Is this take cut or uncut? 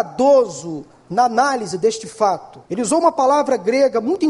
cut